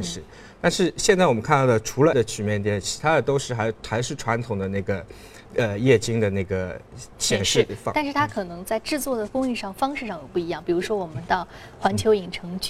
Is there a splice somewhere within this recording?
yes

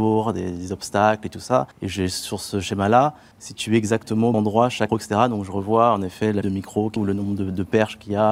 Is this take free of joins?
no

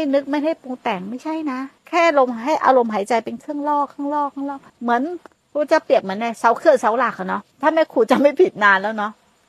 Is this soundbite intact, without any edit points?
no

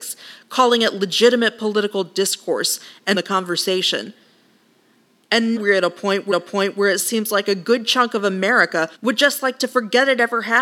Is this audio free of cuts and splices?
no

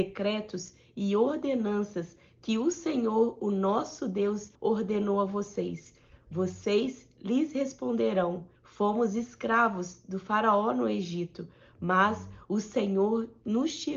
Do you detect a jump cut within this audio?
yes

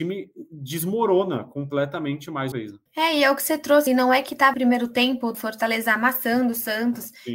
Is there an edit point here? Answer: yes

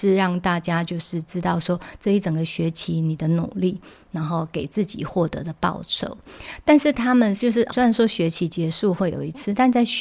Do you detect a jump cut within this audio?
yes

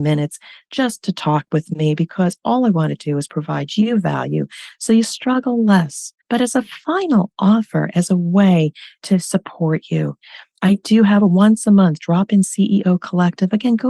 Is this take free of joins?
no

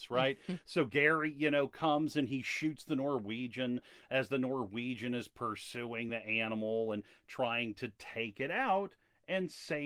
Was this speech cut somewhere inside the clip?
no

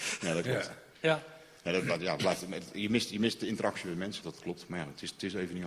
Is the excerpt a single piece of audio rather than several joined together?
no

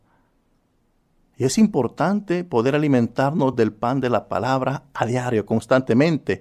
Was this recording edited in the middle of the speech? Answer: no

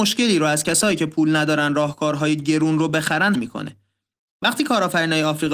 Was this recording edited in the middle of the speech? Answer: yes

